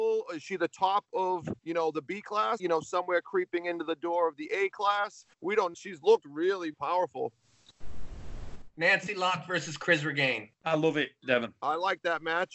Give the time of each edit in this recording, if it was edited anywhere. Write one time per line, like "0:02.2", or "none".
0:01.6
0:02.6
0:05.3
0:05.7
0:06.7
0:10.5